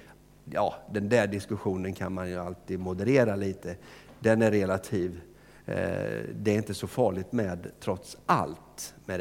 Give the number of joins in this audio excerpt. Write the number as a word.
zero